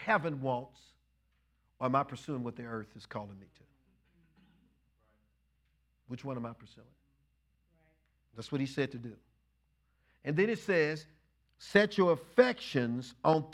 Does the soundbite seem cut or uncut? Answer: uncut